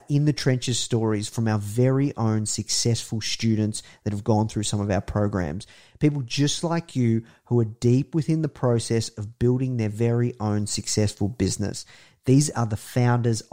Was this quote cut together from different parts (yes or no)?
no